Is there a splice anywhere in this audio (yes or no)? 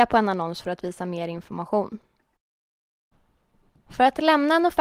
no